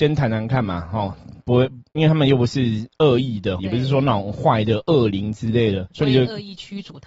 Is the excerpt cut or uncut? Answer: cut